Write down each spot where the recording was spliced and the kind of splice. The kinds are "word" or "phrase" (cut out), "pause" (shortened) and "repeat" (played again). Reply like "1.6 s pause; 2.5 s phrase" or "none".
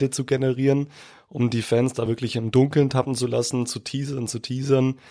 none